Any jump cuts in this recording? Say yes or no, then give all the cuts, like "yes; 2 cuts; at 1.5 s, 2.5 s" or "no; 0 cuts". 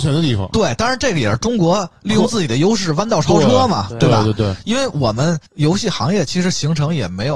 yes; 1 cut; at 5.5 s